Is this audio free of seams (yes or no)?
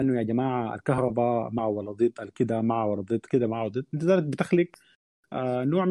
yes